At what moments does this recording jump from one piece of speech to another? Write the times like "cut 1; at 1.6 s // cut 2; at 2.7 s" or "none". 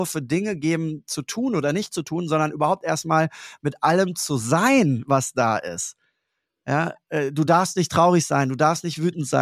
none